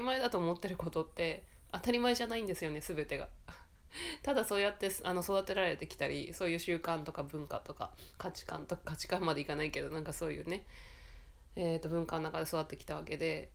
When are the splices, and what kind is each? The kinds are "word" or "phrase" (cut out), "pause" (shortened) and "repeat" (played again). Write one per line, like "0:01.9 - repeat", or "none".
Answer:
0:08.1 - pause